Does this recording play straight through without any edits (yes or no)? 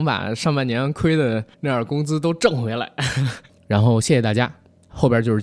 no